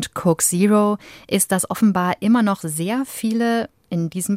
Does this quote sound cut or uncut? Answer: uncut